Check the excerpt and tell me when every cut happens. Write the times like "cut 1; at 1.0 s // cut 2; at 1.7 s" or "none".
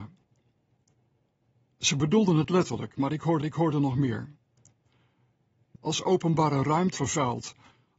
cut 1; at 3.4 s // cut 2; at 5.7 s // cut 3; at 7.0 s